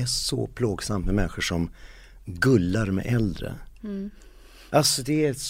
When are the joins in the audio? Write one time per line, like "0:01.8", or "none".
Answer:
0:03.7